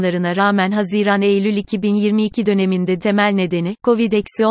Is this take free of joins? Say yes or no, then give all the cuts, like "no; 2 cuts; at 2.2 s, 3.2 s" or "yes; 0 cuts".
no; 1 cut; at 3.0 s